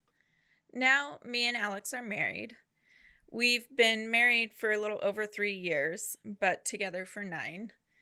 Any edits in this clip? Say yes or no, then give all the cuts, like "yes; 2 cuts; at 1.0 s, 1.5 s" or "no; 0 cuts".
no; 0 cuts